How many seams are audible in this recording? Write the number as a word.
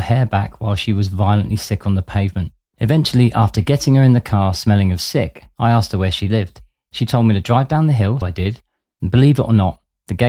one